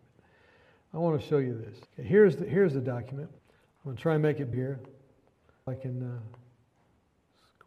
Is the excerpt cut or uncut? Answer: cut